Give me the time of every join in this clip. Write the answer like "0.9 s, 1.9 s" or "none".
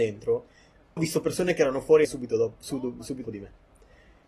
1.0 s, 2.0 s, 3.2 s